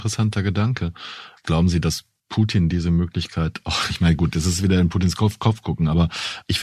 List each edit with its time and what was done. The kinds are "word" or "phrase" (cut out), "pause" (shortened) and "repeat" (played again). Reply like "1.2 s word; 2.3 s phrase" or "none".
2.2 s pause